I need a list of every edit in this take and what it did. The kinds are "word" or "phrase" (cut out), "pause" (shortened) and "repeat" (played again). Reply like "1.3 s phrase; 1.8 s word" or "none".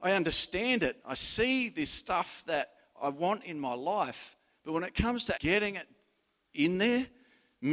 5.3 s word